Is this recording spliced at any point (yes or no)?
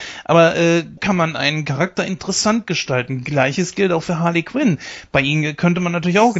yes